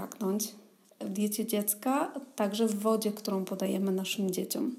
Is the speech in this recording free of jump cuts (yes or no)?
yes